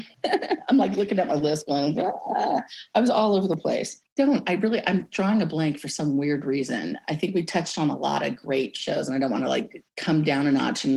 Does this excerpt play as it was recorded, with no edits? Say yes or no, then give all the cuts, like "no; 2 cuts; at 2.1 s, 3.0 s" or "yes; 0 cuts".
yes; 0 cuts